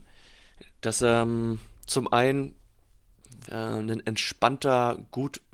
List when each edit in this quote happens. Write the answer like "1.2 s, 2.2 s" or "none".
1.0 s, 1.8 s, 3.5 s